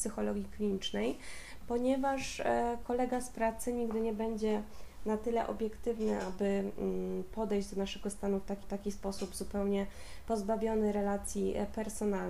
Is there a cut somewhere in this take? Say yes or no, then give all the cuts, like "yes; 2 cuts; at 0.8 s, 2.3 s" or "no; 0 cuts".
yes; 1 cut; at 8.6 s